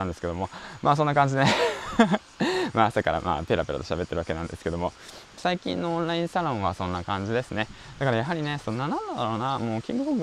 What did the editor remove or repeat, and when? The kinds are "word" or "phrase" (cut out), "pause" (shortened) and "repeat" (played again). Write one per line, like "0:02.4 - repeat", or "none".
0:05.3 - phrase